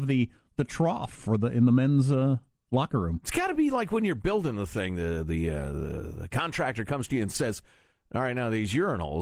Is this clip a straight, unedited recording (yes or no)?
yes